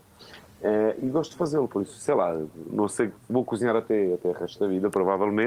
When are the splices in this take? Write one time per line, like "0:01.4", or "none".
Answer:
0:02.7